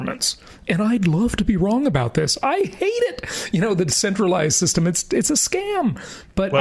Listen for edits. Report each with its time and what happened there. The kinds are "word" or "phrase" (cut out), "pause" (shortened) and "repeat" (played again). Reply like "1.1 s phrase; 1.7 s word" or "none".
none